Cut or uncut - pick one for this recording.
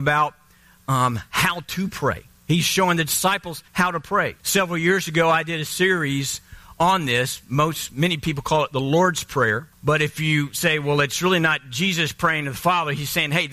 cut